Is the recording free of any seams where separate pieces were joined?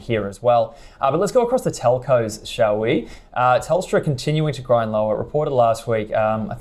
yes; 0 cuts

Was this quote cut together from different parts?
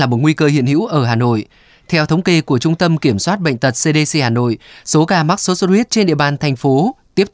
no; 0 cuts

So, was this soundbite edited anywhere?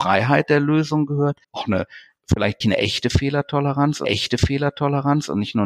yes; 3 cuts; at 1.4 s, 2.6 s, 4.0 s

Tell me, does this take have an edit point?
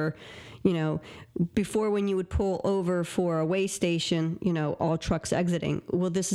no; 0 cuts

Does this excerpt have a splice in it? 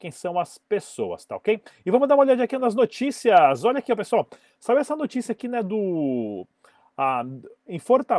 no; 0 cuts

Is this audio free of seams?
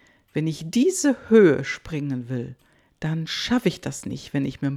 yes; 0 cuts

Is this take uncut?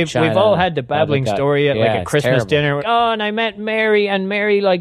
no; 1 cut; at 2.8 s

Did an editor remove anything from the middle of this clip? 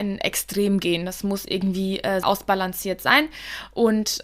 yes; 1 cut; at 2.2 s

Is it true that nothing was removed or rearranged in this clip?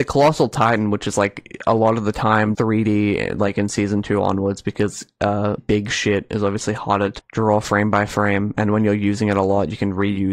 no; 3 cuts; at 2.5 s, 5.6 s, 7.2 s

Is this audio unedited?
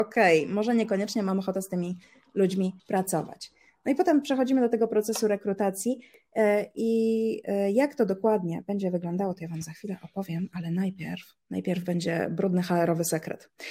no; 2 cuts; at 2.8 s, 11.4 s

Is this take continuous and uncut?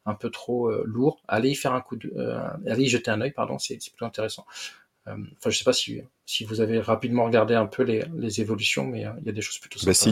yes; 0 cuts

